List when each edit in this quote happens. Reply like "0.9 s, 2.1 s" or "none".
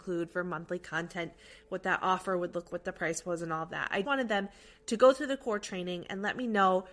2.7 s, 4.0 s